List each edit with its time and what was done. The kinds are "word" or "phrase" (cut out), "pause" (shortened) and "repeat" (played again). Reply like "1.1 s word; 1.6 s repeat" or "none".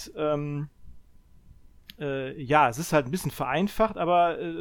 none